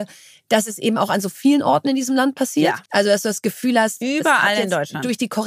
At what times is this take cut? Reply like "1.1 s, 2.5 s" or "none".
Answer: 2.9 s